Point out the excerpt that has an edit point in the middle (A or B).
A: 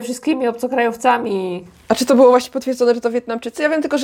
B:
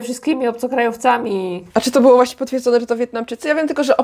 B